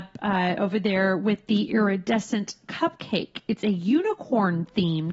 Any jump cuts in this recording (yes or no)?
no